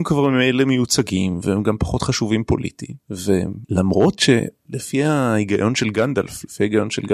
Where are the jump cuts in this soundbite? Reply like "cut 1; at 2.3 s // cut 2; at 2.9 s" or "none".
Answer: cut 1; at 3.0 s